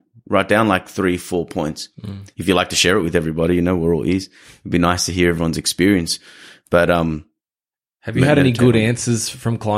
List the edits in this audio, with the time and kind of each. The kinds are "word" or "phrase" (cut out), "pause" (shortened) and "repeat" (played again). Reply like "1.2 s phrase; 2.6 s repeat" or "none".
none